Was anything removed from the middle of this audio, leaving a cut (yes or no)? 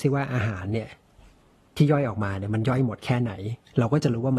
no